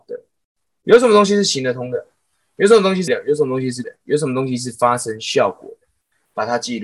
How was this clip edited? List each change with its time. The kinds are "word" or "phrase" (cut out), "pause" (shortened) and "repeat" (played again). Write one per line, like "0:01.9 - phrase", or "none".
0:03.1 - word
0:03.8 - word